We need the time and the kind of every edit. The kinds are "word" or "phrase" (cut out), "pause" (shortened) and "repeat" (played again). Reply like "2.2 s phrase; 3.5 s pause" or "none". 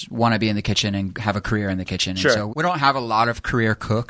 2.5 s word